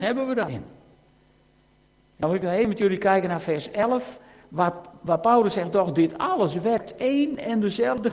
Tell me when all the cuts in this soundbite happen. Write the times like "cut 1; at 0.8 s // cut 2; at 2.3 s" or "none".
none